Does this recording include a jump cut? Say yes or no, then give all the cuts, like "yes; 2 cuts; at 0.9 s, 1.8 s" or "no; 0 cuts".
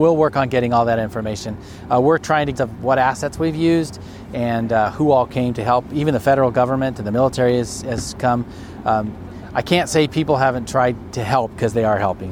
yes; 1 cut; at 2.5 s